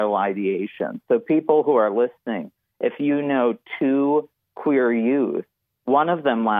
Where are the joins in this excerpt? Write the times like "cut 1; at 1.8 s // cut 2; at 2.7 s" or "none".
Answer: none

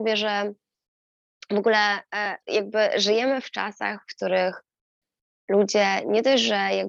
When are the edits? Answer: cut 1; at 2.4 s

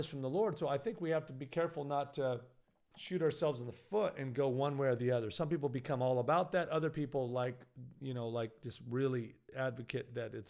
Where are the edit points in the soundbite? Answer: cut 1; at 2.6 s

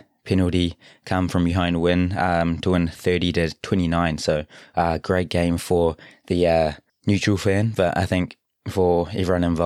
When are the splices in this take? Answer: none

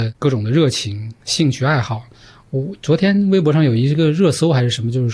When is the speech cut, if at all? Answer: none

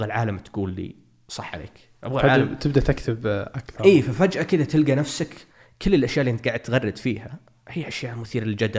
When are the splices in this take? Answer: none

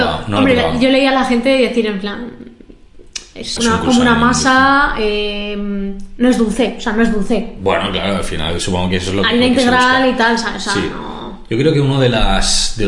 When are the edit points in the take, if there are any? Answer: cut 1; at 3.6 s

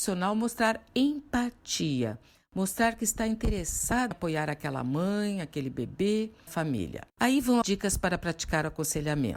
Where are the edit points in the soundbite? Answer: cut 1; at 4.1 s // cut 2; at 6.5 s // cut 3; at 7.1 s // cut 4; at 7.6 s

